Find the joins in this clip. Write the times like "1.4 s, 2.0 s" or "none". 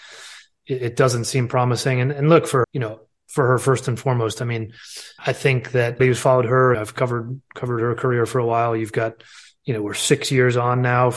2.6 s, 3.1 s, 5.2 s, 6.0 s, 6.7 s